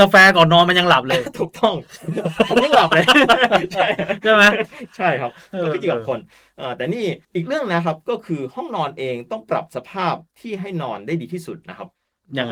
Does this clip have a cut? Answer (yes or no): yes